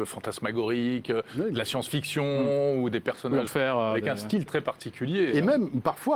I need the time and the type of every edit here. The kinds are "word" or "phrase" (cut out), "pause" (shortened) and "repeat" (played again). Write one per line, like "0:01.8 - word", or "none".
0:03.5 - phrase
0:04.5 - word